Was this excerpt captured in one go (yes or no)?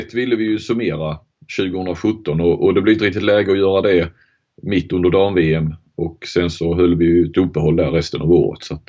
yes